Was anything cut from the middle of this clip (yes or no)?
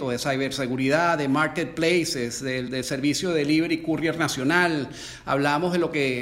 no